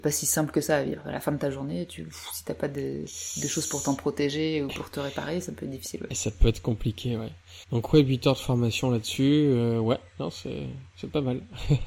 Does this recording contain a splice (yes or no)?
yes